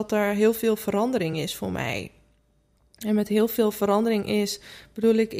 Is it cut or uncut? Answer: uncut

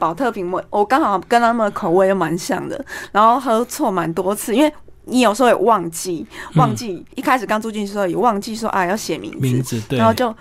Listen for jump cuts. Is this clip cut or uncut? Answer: cut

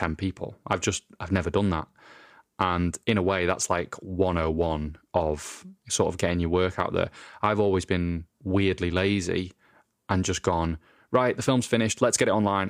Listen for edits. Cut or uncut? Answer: cut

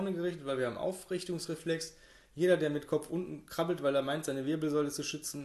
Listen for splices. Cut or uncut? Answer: uncut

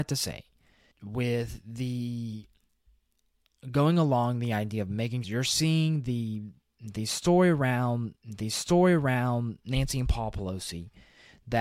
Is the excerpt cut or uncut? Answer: cut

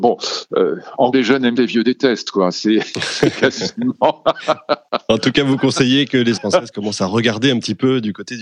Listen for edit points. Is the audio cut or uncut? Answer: cut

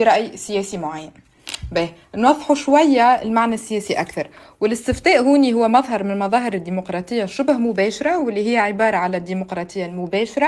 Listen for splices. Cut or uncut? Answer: uncut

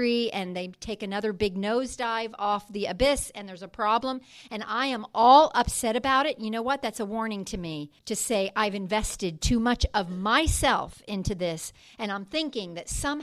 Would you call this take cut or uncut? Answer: cut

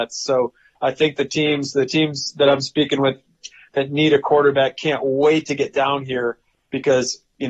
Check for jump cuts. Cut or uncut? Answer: uncut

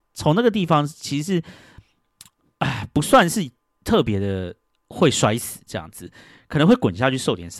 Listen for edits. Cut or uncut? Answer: uncut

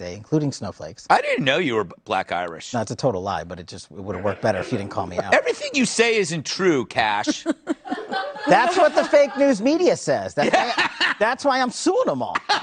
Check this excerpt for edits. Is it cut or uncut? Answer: uncut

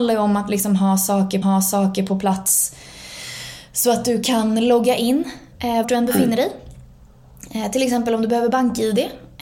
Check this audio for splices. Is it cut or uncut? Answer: cut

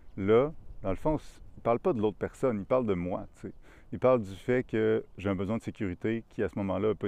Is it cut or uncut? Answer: uncut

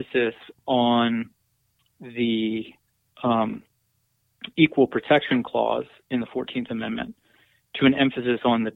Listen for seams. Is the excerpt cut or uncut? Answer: uncut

